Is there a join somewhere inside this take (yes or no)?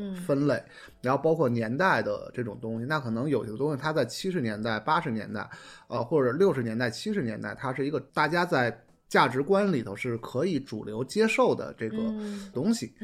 yes